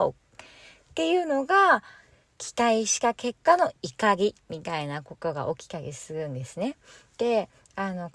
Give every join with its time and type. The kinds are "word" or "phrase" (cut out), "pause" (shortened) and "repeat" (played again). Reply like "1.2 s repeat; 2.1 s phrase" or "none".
none